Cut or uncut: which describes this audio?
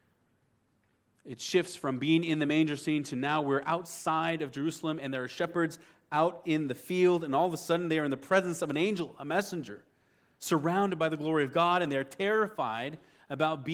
uncut